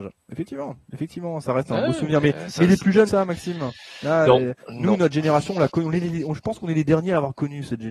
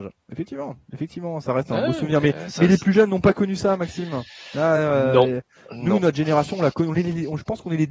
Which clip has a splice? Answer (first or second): first